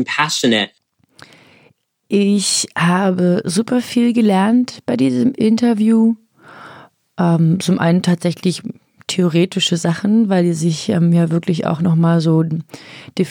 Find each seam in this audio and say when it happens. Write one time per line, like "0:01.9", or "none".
none